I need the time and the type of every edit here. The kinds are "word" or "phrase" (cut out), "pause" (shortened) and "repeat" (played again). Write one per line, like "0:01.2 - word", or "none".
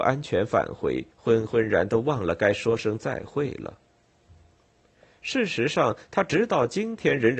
0:01.1 - pause